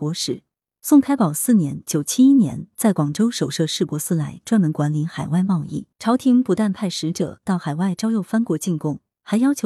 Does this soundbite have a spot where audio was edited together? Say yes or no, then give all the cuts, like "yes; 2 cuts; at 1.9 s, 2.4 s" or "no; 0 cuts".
yes; 1 cut; at 5.9 s